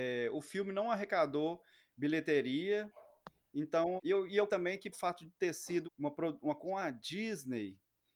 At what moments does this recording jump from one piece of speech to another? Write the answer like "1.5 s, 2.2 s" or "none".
4.0 s, 4.5 s, 4.9 s, 5.8 s, 6.6 s